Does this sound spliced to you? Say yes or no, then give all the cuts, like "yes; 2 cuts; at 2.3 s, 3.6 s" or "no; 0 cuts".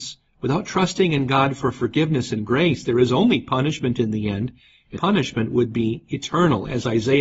yes; 1 cut; at 5.0 s